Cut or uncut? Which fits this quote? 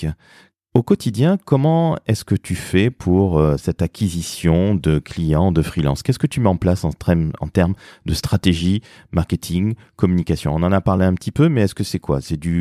uncut